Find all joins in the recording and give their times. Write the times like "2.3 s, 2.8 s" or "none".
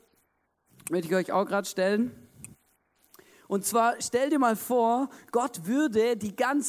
none

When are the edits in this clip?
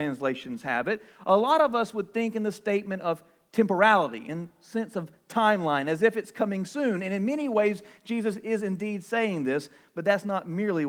none

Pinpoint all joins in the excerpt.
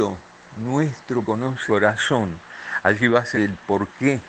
1.2 s, 1.7 s, 3.3 s

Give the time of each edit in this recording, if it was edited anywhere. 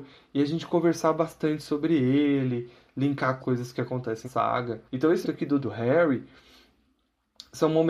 3.4 s, 4.2 s, 4.9 s, 5.2 s, 5.6 s

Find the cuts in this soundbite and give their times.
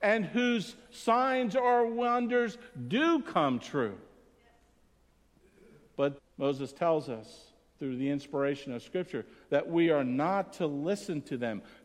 6.2 s

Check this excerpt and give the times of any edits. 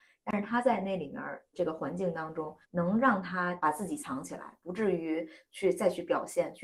2.6 s

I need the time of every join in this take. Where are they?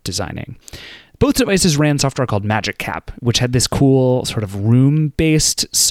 none

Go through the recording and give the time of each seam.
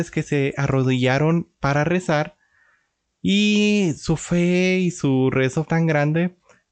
5.6 s

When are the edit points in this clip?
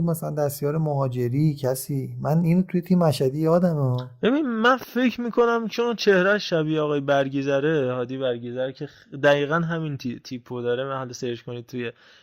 none

